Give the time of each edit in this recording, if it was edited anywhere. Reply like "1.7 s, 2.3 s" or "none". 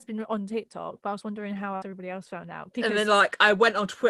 1.8 s